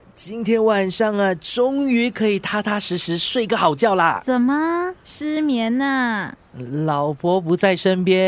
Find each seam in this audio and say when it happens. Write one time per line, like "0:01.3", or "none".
0:05.0

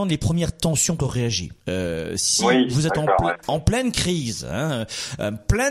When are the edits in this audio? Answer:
0:01.0
0:01.6

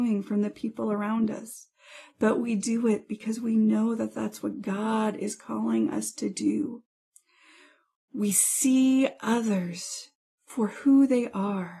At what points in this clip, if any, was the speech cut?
none

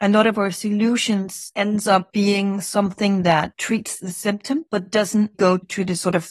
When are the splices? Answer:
0:05.3

